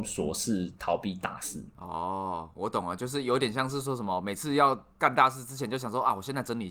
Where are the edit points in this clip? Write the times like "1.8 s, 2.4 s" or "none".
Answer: 4.9 s